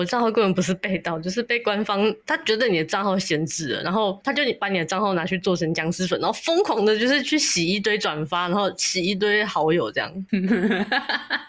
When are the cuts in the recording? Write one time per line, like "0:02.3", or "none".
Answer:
0:02.2